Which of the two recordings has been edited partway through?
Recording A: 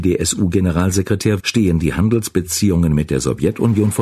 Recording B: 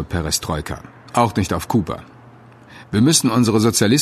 A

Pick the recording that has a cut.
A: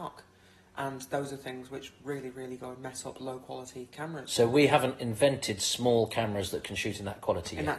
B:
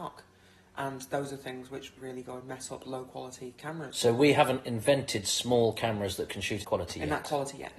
B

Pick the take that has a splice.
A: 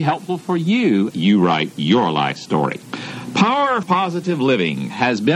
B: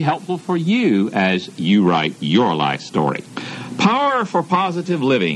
A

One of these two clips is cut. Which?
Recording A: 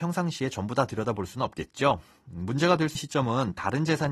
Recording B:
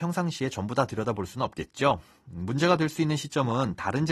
A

